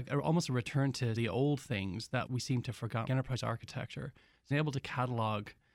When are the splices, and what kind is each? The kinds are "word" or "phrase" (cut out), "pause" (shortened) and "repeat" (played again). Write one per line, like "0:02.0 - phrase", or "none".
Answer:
0:01.2 - phrase
0:02.3 - word
0:03.1 - word
0:04.5 - word